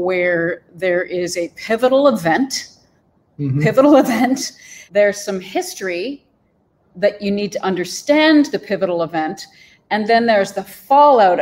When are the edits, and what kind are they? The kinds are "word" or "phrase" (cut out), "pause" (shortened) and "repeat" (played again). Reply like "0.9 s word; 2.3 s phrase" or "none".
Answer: 3.0 s pause; 4.9 s word; 6.8 s word